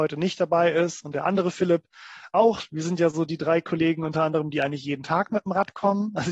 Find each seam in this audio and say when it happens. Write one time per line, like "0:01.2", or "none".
none